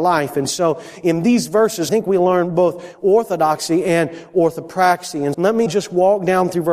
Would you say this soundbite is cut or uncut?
cut